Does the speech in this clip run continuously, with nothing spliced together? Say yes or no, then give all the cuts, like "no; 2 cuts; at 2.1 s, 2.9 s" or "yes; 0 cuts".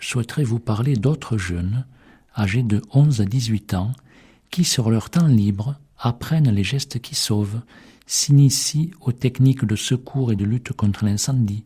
yes; 0 cuts